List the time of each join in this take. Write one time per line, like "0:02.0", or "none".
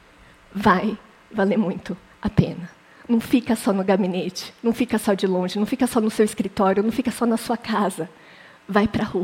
none